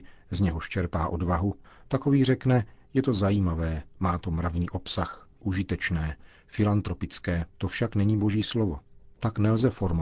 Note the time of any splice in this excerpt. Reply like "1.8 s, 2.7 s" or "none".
1.6 s, 5.4 s, 7.5 s

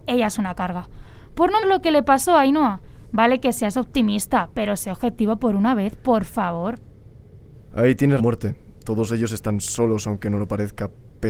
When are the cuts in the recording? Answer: 1.6 s, 8.2 s

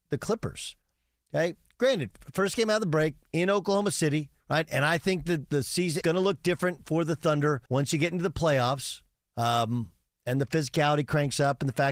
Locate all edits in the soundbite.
4.4 s, 6.0 s, 7.7 s, 9.1 s

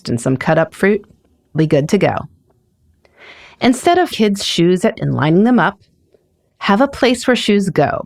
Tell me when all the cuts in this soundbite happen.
1.5 s, 4.1 s, 4.9 s

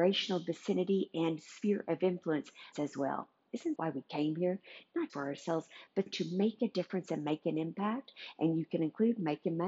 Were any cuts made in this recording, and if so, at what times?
2.7 s, 3.8 s, 5.1 s, 6.1 s

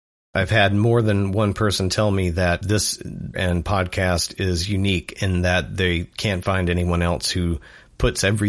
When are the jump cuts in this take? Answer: 3.3 s

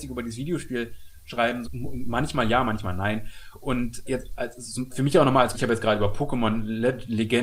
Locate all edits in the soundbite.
1.6 s, 4.1 s, 4.9 s, 5.5 s

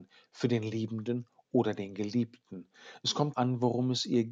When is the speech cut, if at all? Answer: 3.3 s

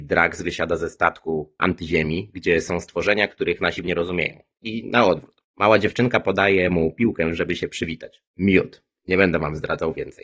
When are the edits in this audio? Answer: 1.6 s, 3.8 s

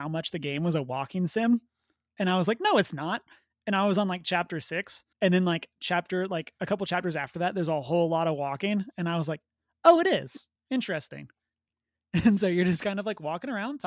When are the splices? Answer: 5.1 s, 10.6 s

